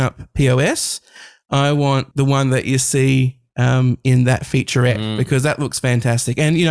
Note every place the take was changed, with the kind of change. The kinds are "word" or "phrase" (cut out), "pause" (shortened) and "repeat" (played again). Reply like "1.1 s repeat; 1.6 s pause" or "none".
2.1 s word